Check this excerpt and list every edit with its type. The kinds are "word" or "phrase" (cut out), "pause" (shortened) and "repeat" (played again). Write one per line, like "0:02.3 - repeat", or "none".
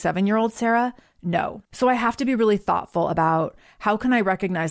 0:01.6 - pause